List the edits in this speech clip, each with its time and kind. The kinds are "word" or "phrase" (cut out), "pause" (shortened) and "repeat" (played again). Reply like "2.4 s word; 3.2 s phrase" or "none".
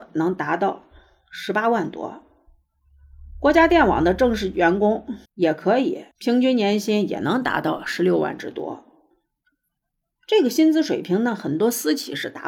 5.3 s pause; 6.1 s pause